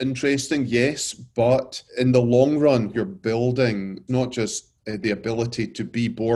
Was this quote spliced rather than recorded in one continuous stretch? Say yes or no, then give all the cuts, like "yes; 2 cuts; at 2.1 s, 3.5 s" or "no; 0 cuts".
yes; 4 cuts; at 1.9 s, 2.9 s, 4.1 s, 4.8 s